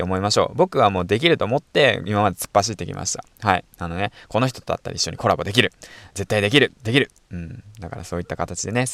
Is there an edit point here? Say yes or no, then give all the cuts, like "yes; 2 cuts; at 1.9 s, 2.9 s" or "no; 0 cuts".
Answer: yes; 1 cut; at 6.8 s